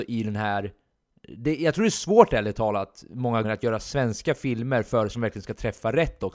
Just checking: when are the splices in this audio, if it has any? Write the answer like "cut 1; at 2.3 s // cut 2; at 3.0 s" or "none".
cut 1; at 3.4 s // cut 2; at 5.1 s